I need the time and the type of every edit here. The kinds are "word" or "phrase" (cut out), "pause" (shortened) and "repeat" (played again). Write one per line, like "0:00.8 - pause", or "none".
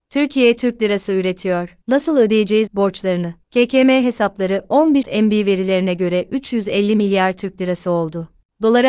0:01.8 - pause
0:02.7 - phrase
0:03.4 - pause
0:05.0 - word